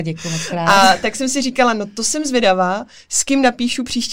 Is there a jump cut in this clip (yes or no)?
no